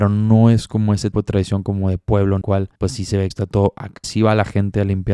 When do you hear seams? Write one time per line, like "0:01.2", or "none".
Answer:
0:01.1
0:02.4
0:02.8
0:03.3
0:04.0